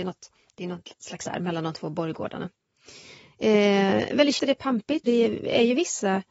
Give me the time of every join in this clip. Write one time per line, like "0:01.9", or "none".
0:01.3
0:04.4
0:05.1